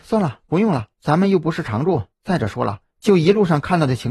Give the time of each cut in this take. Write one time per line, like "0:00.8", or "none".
0:00.9
0:02.1
0:02.9